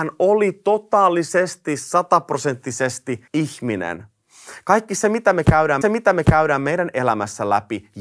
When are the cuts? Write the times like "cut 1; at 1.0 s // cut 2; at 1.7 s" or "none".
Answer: cut 1; at 3.3 s // cut 2; at 5.8 s